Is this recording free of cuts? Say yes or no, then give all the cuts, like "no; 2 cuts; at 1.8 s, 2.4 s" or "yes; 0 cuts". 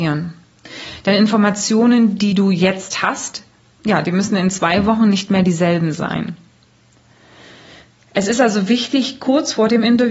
yes; 0 cuts